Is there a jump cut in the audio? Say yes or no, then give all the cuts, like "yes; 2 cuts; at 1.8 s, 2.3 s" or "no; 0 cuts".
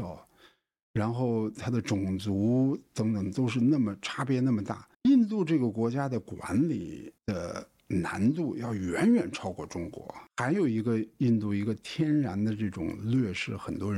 yes; 2 cuts; at 4.9 s, 7.2 s